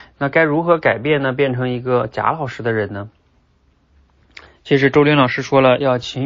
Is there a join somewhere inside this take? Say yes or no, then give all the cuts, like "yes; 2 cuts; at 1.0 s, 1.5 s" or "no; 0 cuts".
yes; 1 cut; at 4.5 s